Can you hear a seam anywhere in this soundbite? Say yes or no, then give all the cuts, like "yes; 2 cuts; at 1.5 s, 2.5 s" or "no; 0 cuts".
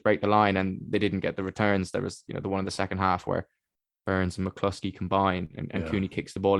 no; 0 cuts